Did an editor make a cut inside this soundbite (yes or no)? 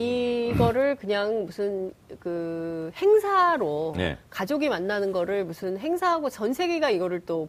no